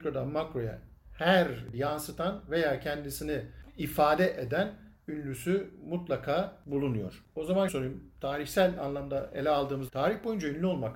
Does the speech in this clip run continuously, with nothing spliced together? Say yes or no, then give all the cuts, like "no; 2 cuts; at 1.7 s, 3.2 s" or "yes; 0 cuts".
no; 3 cuts; at 1.7 s, 7.7 s, 9.9 s